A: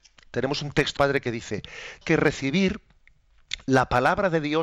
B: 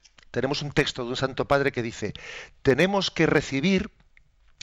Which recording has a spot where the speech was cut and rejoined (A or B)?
A